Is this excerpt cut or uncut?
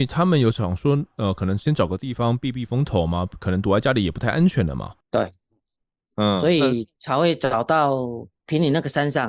uncut